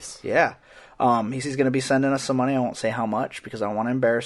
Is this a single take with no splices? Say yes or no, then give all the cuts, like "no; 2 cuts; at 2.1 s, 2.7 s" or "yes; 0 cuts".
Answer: no; 1 cut; at 1.4 s